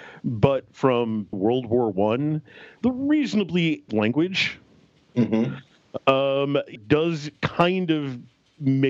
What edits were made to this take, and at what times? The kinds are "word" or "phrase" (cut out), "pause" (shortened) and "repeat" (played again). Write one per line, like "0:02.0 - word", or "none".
0:01.3 - word
0:02.8 - word
0:03.9 - word
0:06.8 - word